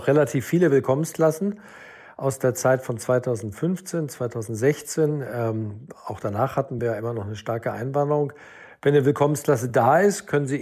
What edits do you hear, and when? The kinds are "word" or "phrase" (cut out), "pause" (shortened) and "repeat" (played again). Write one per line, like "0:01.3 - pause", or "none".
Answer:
none